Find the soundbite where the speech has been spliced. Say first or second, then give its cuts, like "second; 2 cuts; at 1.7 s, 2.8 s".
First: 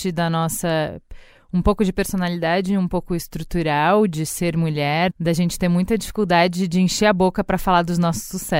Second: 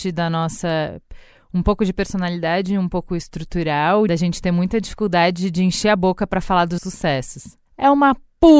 second; 2 cuts; at 4.1 s, 6.8 s